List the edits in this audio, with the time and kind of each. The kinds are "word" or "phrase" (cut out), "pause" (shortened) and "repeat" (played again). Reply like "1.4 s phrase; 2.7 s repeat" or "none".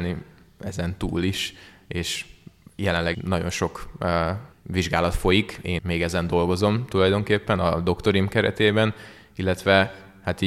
3.1 s word; 4.5 s pause; 5.8 s word